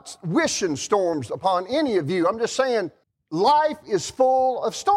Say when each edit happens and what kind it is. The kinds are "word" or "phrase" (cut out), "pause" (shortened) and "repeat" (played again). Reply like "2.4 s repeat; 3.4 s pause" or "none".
3.0 s pause